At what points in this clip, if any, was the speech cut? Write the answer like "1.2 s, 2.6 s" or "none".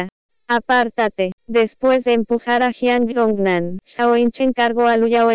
1.4 s, 3.8 s